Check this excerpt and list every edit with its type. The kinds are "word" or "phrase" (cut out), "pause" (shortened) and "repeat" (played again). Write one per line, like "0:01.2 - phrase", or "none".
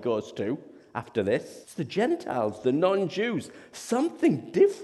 0:01.6 - pause